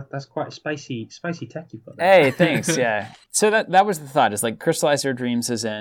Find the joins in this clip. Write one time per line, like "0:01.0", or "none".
0:03.2